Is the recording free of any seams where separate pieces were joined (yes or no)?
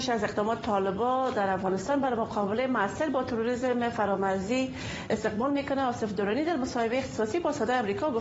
yes